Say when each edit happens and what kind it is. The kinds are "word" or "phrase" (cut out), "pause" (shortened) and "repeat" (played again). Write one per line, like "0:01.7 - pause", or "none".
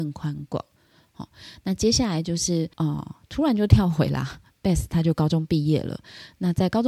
0:02.7 - pause